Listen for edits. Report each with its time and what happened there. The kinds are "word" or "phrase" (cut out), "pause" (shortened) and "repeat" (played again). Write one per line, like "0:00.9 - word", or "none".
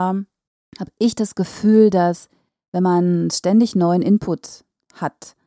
none